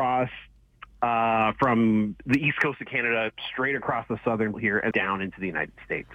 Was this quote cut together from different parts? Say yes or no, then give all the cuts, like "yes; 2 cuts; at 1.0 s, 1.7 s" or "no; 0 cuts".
yes; 2 cuts; at 4.5 s, 4.9 s